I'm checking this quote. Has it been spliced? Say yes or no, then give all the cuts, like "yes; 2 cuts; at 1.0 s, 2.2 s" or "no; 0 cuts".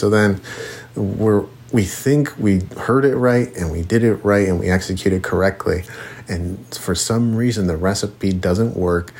no; 0 cuts